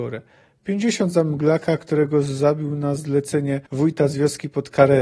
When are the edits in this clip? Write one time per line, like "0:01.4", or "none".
0:03.7